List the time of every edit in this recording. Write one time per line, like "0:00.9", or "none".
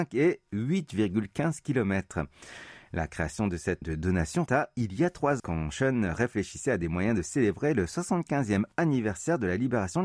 0:03.8
0:04.5
0:05.4